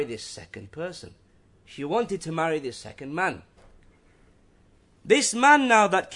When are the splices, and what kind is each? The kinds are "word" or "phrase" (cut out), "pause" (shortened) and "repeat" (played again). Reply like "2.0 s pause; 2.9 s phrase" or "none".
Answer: none